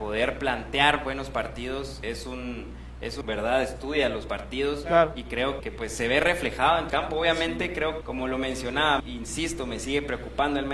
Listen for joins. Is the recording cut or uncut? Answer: cut